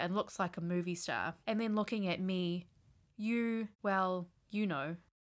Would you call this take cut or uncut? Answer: cut